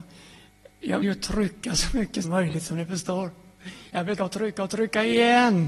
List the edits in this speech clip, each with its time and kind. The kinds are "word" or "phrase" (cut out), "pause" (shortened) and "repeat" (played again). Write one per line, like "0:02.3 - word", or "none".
0:01.0 - word
0:02.2 - word
0:04.2 - word